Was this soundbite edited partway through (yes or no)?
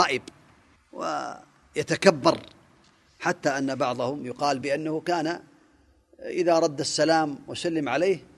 no